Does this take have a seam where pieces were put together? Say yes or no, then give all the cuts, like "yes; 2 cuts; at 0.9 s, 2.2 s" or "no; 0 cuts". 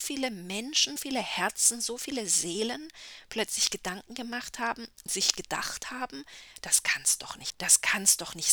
yes; 3 cuts; at 1.0 s, 5.1 s, 7.5 s